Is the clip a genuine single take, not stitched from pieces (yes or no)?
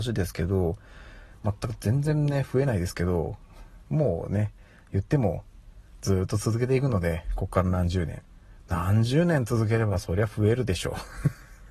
yes